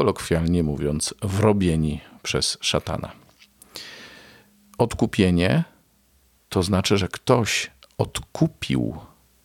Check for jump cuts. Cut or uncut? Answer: uncut